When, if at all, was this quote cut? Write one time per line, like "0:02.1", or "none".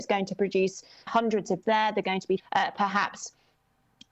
0:01.1
0:01.6
0:02.0
0:02.4